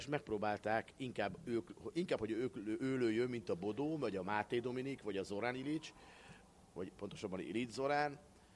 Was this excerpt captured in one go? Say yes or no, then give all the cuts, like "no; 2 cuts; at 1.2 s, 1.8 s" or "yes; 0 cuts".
yes; 0 cuts